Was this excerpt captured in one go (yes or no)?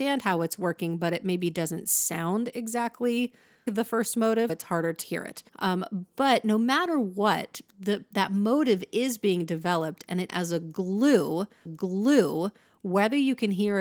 no